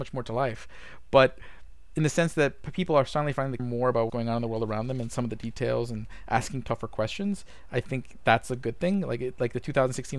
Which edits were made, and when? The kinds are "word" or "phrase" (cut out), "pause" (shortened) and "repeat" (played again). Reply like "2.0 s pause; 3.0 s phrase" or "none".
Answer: 3.6 s word; 4.1 s word